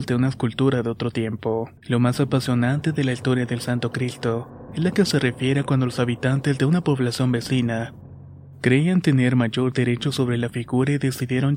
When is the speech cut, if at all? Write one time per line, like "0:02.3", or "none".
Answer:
0:01.8

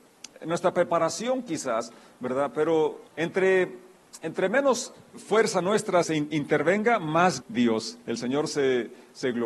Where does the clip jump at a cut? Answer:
0:03.1
0:05.1
0:06.0
0:07.4

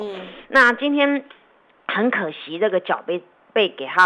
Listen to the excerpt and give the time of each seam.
none

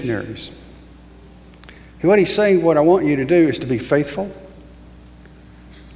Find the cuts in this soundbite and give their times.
none

